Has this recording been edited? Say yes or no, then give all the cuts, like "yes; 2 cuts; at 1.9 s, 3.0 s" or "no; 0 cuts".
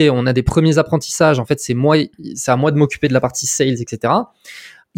no; 0 cuts